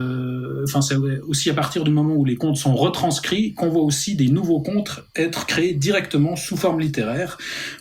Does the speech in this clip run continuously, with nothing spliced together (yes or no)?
yes